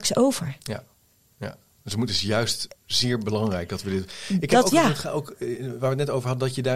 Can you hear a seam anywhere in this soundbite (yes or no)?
yes